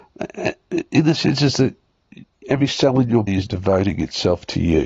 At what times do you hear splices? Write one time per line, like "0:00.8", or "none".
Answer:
0:01.1
0:02.4
0:03.3